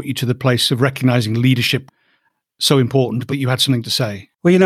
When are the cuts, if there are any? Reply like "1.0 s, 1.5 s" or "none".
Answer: 1.9 s, 3.3 s